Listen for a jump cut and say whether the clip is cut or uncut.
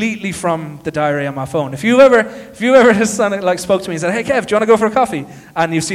uncut